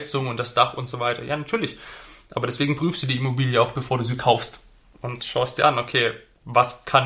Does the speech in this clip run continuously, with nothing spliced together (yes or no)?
yes